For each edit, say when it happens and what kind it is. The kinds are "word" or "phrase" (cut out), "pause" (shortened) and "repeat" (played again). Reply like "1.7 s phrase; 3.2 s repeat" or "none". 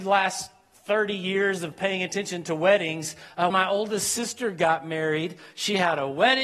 3.5 s word